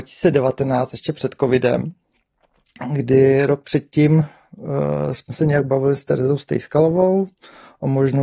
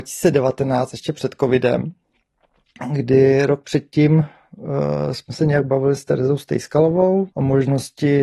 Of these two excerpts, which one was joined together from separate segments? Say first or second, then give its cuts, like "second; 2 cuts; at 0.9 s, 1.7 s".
second; 1 cut; at 7.3 s